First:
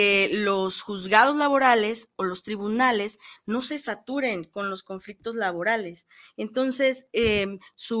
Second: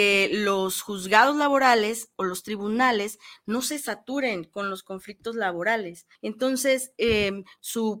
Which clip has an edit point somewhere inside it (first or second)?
second